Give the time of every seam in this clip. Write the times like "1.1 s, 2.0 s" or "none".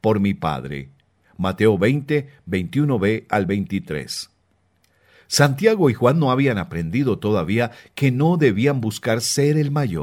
none